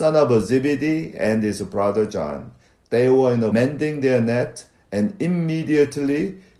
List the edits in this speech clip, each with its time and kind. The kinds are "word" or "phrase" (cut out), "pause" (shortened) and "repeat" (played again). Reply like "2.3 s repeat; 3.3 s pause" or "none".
3.5 s phrase